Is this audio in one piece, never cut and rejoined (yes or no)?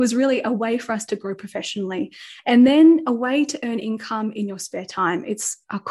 yes